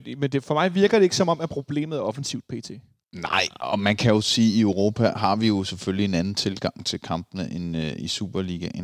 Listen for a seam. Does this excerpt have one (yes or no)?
no